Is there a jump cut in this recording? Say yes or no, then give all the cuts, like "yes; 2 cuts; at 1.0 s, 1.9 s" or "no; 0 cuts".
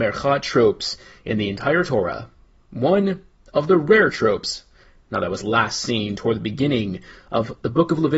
no; 0 cuts